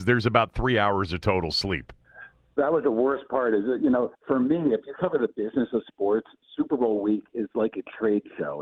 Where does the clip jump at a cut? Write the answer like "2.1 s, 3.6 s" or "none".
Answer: 4.1 s